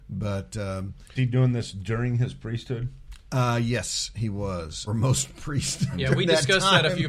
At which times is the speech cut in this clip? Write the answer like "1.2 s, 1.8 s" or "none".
1.2 s, 4.9 s